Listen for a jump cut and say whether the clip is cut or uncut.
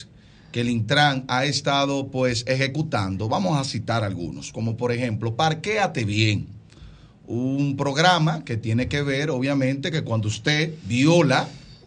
uncut